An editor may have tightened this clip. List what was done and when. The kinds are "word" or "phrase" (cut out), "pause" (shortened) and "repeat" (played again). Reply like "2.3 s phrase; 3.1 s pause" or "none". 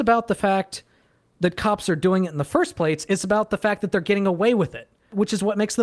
none